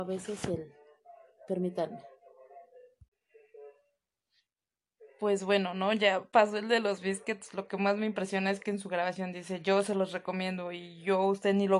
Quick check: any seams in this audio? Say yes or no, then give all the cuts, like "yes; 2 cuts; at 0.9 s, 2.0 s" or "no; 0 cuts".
no; 0 cuts